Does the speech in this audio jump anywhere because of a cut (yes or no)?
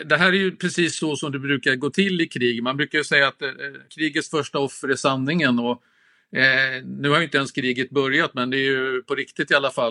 yes